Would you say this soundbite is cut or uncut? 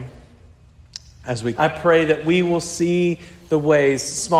cut